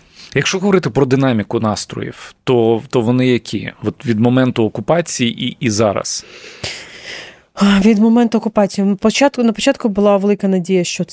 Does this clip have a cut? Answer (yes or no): no